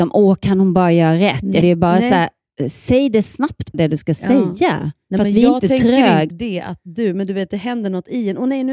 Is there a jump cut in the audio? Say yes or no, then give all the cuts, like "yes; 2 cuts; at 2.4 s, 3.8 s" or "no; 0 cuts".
yes; 3 cuts; at 1.6 s, 3.7 s, 6.3 s